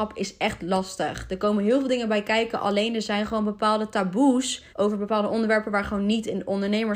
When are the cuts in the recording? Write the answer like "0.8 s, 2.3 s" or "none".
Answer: 4.7 s